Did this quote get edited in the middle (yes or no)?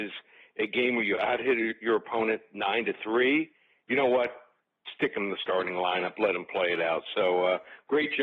no